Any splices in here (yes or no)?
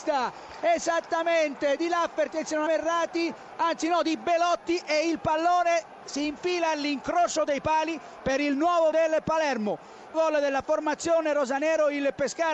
yes